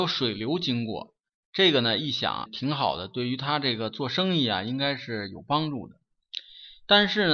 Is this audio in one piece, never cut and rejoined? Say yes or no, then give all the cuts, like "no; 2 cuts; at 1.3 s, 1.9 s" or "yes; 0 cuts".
no; 1 cut; at 2.5 s